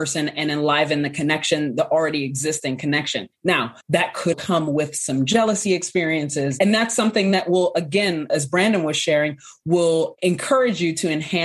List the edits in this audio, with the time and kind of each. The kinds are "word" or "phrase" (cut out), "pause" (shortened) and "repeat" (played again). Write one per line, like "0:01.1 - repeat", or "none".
0:03.8 - pause
0:04.3 - word
0:08.3 - word